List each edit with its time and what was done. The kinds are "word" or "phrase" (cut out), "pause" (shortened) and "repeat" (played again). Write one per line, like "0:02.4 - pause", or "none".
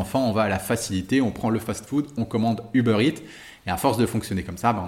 none

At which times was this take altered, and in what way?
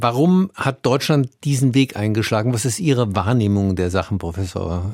none

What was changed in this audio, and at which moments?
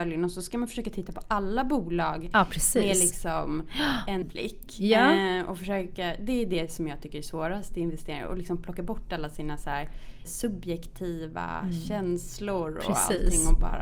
0:04.2 - word
0:10.2 - word

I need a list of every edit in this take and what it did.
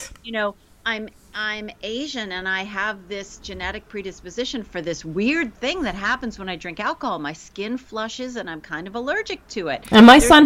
none

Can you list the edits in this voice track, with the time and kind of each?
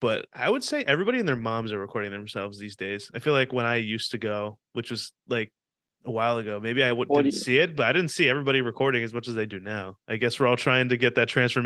0:05.8 - pause

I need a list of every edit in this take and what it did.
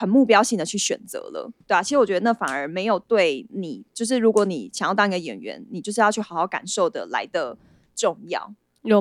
0:01.6 - pause

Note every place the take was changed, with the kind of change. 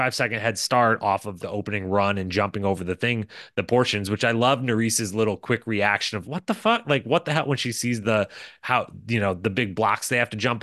0:01.4 - word
0:06.2 - word

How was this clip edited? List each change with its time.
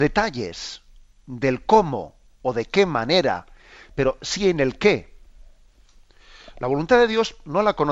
none

